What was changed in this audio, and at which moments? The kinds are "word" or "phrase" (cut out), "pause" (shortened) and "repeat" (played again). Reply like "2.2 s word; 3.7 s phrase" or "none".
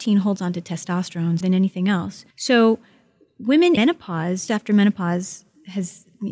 1.4 s word; 2.3 s pause; 3.8 s word; 4.5 s word